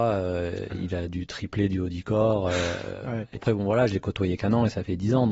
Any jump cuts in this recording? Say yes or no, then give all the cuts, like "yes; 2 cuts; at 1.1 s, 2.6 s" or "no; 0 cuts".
yes; 1 cut; at 3.4 s